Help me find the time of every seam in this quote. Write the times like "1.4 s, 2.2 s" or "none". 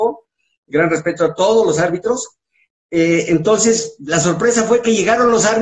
none